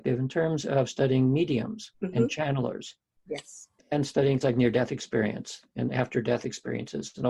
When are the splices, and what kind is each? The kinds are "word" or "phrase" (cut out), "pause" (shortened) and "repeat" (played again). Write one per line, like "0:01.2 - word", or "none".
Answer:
0:01.9 - pause
0:03.8 - pause
0:04.4 - word